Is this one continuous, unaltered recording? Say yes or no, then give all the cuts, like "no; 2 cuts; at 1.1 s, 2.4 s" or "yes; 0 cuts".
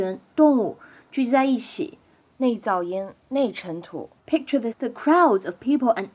no; 2 cuts; at 4.2 s, 4.7 s